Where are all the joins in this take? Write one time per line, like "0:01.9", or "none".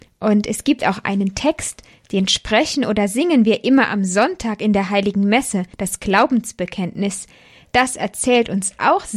0:05.7